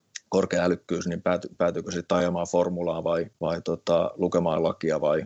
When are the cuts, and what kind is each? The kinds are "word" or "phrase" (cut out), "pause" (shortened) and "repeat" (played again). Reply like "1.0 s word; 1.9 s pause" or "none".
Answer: 3.4 s pause